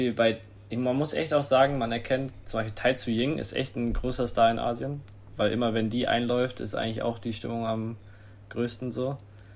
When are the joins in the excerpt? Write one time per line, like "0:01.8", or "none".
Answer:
none